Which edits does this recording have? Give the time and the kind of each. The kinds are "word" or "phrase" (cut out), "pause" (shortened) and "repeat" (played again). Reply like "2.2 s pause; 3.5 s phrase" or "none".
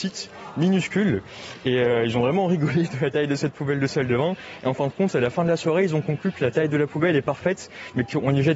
none